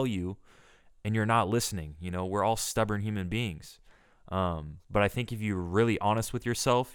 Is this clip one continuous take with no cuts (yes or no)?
no